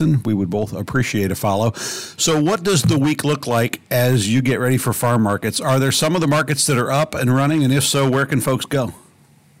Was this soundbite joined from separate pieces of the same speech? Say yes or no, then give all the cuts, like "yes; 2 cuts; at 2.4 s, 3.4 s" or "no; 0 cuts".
no; 0 cuts